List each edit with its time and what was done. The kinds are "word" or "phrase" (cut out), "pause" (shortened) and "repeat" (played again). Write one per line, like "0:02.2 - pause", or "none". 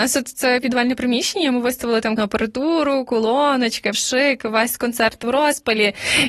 0:02.2 - word
0:03.9 - word